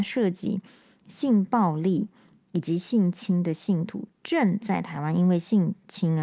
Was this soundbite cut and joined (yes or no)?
no